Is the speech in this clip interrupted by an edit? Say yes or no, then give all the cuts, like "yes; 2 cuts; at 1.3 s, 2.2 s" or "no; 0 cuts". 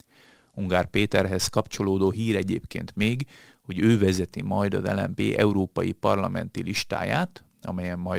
no; 0 cuts